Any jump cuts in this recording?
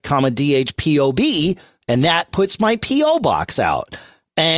no; 0 cuts

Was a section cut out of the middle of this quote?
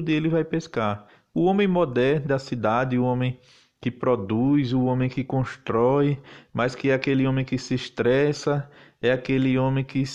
yes; 1 cut; at 2.3 s

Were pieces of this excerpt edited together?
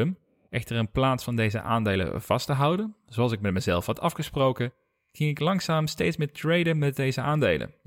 no; 0 cuts

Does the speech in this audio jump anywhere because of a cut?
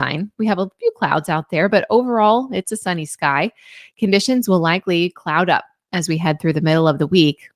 no; 0 cuts

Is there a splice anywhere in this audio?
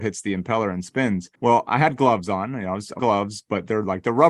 yes; 2 cuts; at 1.3 s, 3.0 s

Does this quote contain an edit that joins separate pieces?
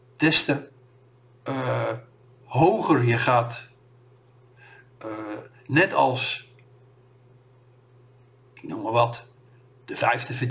no; 0 cuts

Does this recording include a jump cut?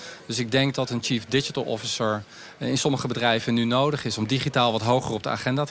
no; 0 cuts

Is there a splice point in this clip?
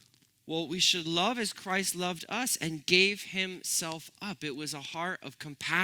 no; 0 cuts

